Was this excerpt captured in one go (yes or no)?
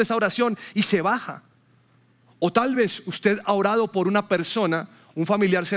yes